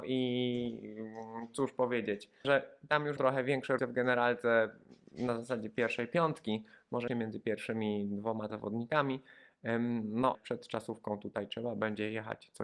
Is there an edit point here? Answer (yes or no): yes